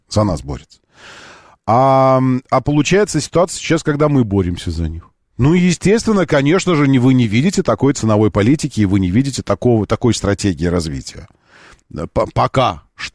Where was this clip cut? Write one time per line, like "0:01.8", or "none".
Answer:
none